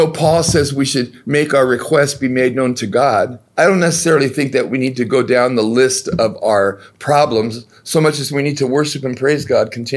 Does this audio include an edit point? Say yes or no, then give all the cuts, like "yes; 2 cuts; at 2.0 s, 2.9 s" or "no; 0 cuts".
yes; 1 cut; at 3.5 s